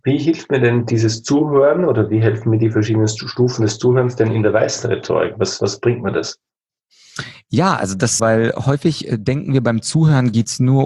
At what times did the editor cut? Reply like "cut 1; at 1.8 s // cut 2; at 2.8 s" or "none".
cut 1; at 8.2 s